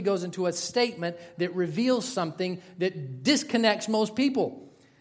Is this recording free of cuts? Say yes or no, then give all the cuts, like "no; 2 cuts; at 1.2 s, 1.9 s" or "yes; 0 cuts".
yes; 0 cuts